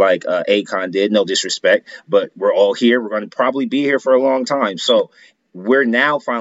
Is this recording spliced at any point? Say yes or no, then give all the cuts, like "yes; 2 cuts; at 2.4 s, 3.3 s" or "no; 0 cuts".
no; 0 cuts